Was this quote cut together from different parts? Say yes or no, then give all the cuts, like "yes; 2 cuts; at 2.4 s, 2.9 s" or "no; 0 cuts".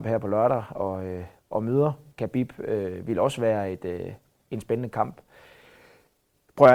no; 0 cuts